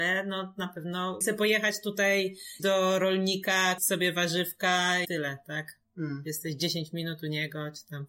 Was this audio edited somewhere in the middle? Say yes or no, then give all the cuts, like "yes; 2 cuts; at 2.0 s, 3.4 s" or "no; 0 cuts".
yes; 4 cuts; at 1.2 s, 2.6 s, 3.8 s, 5.0 s